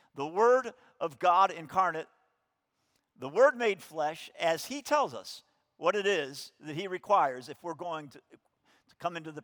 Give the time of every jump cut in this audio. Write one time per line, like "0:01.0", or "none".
none